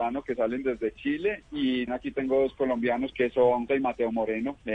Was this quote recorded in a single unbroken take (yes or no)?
no